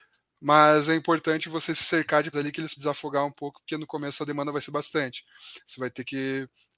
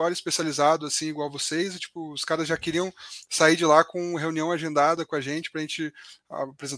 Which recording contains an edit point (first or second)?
first